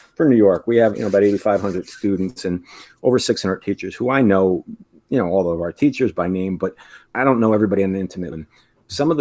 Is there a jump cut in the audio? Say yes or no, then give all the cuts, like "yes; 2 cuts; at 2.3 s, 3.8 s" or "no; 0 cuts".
yes; 2 cuts; at 0.9 s, 8.3 s